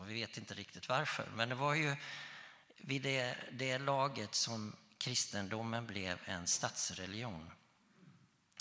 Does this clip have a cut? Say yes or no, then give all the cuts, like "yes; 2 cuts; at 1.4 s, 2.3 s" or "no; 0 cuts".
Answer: no; 0 cuts